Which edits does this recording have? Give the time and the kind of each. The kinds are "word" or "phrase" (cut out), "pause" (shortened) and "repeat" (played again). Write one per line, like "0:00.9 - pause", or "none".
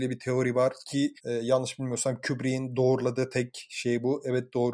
0:01.2 - pause